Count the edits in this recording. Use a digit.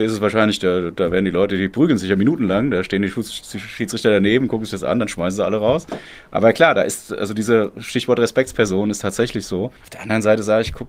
1